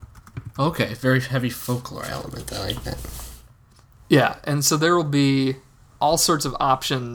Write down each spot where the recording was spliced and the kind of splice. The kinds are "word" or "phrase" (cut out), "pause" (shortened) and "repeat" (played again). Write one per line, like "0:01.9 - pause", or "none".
none